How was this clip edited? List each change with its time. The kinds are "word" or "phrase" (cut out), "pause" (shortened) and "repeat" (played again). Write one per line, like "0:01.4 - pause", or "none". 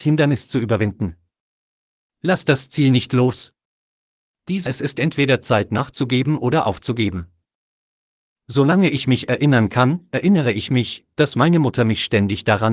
0:04.7 - word